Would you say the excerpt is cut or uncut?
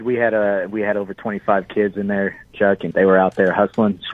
cut